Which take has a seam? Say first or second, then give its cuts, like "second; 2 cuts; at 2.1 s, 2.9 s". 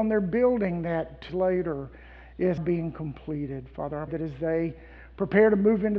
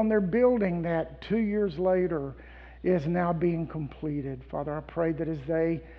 first; 3 cuts; at 1.3 s, 2.6 s, 4.1 s